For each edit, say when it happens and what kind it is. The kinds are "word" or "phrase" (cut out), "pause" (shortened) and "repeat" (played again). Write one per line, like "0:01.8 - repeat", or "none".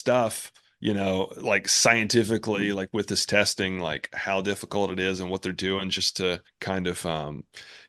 0:06.5 - pause